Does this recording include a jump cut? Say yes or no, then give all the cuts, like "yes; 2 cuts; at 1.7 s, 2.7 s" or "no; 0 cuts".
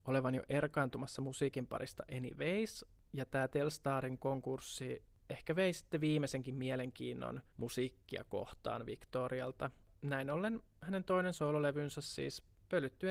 no; 0 cuts